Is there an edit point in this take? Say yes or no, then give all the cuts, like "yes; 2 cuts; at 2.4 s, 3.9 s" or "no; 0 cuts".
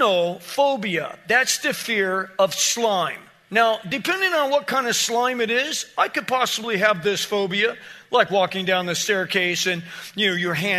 no; 0 cuts